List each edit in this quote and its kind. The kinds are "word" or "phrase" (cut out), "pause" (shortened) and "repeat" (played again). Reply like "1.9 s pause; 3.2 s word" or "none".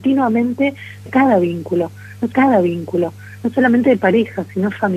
1.1 s word; 2.3 s repeat